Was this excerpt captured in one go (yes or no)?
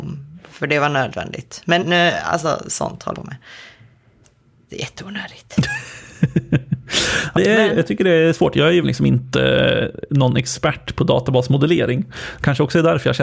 no